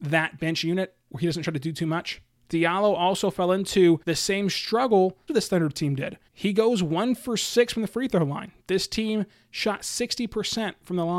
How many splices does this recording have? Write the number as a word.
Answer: four